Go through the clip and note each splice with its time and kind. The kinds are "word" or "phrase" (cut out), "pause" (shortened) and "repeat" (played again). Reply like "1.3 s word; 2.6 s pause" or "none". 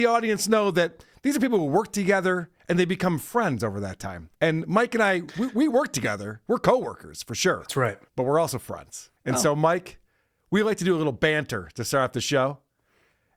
4.3 s pause; 8.1 s pause; 9.2 s pause